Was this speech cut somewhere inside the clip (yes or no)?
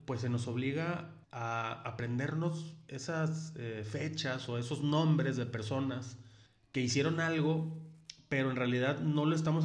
yes